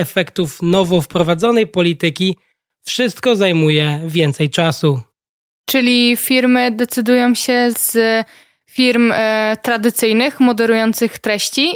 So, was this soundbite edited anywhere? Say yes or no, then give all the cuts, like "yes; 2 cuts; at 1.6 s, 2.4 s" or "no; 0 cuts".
yes; 1 cut; at 7.7 s